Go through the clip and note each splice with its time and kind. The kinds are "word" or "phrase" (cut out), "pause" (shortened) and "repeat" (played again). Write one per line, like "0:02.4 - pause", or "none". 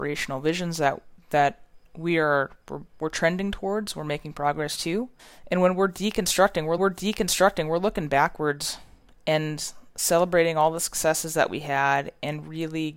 0:01.8 - pause
0:05.2 - pause
0:06.8 - repeat